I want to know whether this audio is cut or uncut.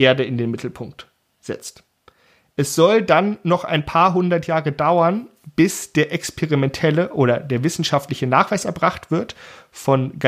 uncut